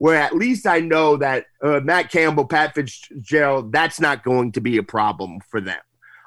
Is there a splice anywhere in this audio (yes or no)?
yes